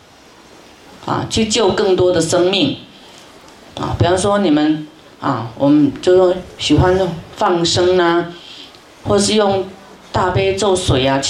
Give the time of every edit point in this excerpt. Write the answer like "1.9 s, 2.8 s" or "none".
9.1 s